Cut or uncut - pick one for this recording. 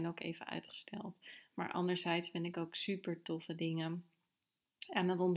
uncut